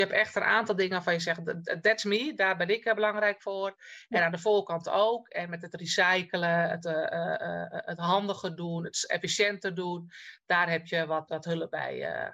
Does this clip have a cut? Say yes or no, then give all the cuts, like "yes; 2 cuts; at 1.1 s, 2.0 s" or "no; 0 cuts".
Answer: yes; 1 cut; at 11.3 s